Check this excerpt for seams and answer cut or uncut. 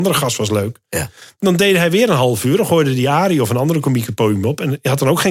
uncut